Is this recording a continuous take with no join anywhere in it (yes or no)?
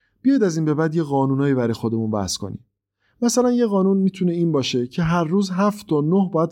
yes